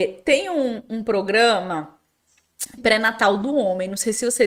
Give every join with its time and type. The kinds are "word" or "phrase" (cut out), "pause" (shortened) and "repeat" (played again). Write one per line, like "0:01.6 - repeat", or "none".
0:02.8 - word